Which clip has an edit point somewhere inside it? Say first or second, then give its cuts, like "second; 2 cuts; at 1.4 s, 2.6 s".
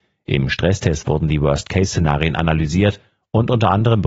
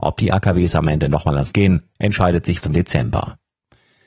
second; 2 cuts; at 1.5 s, 2.6 s